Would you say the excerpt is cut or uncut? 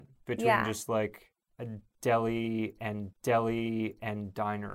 cut